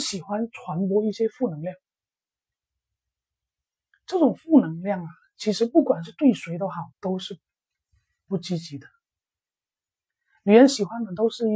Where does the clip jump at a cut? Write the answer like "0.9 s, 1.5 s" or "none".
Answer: 6.9 s

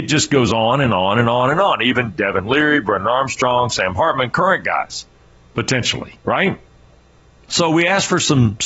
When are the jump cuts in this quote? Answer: none

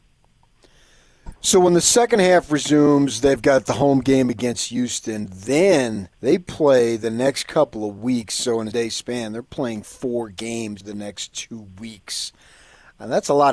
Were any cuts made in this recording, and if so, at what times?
1.4 s, 6.1 s, 8.7 s, 10.8 s

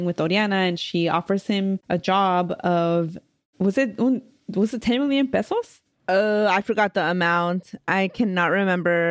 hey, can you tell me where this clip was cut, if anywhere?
none

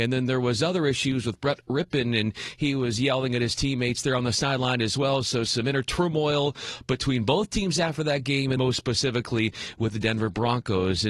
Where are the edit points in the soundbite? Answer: 8.6 s

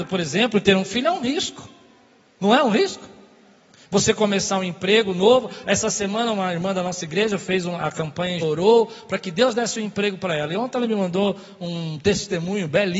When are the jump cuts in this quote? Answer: 8.4 s

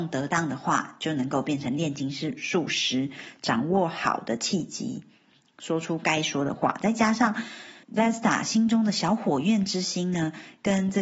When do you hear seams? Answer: 7.8 s

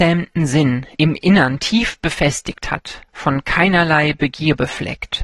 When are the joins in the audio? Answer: 3.1 s

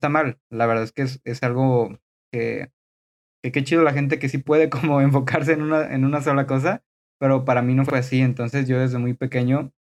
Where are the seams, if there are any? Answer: none

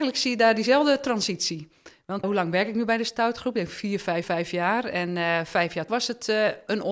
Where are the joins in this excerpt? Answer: 2.2 s, 4.2 s, 5.9 s

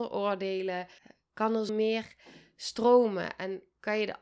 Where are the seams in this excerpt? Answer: 1.0 s, 1.7 s

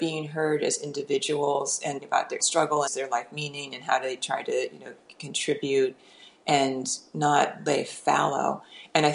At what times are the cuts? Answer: 2.0 s, 2.4 s, 2.9 s

